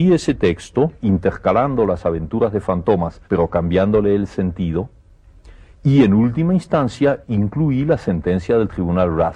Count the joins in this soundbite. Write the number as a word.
three